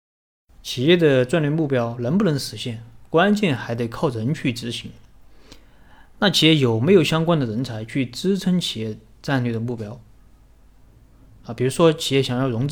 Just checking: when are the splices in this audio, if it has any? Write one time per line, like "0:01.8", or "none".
none